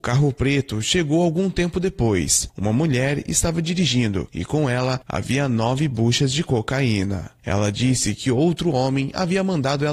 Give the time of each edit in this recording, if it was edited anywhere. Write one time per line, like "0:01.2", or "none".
none